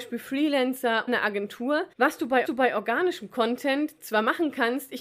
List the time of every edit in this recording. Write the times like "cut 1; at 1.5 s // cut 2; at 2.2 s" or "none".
cut 1; at 1.1 s // cut 2; at 1.9 s // cut 3; at 2.4 s